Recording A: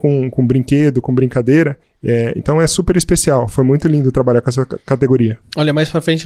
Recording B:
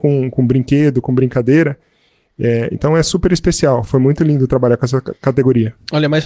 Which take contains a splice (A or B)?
A